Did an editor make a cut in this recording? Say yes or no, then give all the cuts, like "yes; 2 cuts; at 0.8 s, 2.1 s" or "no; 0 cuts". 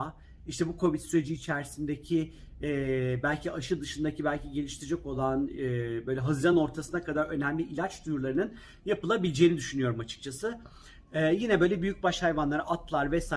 no; 0 cuts